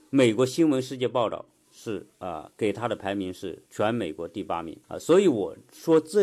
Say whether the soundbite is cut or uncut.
cut